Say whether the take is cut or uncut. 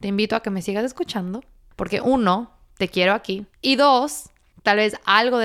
cut